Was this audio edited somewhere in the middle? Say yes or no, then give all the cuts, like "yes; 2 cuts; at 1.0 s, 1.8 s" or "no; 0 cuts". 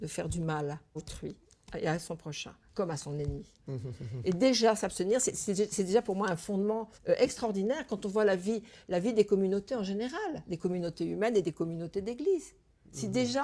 yes; 2 cuts; at 1.0 s, 7.0 s